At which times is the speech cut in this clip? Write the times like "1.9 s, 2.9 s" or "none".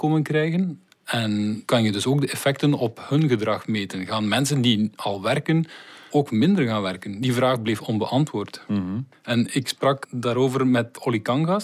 none

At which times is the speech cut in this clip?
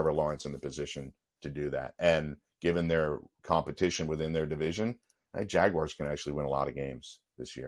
none

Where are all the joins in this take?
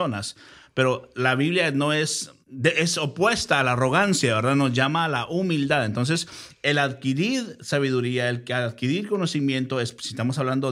2.4 s

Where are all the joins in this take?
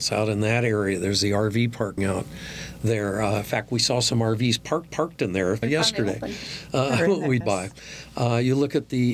2.0 s, 4.9 s, 5.6 s, 7.4 s

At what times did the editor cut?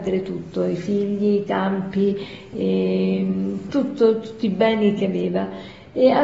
none

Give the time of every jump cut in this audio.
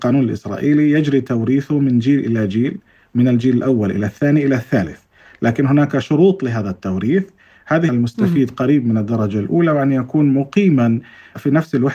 7.9 s

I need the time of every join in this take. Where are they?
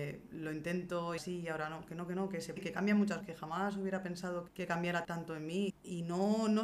1.2 s, 2.6 s, 3.2 s, 4.5 s, 5.0 s, 5.7 s

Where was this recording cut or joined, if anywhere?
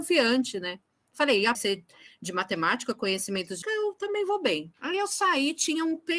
1.5 s, 3.6 s, 4.8 s

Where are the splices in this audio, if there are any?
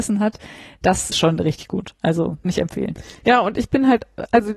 1.1 s, 2.4 s

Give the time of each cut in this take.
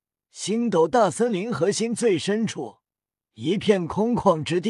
none

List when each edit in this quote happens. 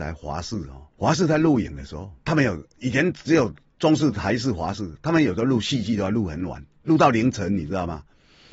0.9 s, 2.2 s

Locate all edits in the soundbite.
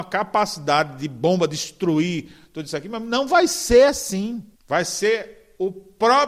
4.5 s

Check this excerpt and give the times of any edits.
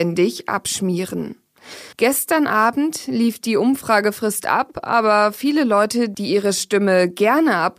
1.9 s

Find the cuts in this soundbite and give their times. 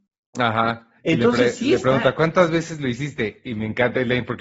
1.0 s

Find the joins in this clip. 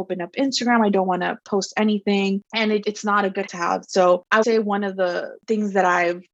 2.8 s, 3.5 s, 4.4 s

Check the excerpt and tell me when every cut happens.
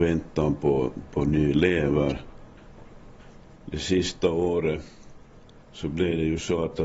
5.6 s

